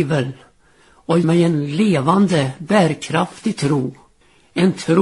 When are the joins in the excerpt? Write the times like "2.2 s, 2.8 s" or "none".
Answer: 1.2 s